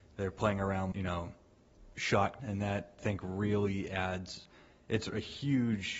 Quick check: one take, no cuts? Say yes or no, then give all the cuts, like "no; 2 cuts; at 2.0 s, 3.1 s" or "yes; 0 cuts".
no; 3 cuts; at 0.9 s, 2.4 s, 3.0 s